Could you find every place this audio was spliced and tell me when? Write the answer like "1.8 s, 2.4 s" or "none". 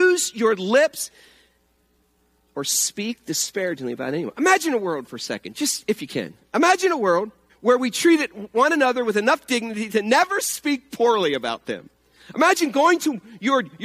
7.5 s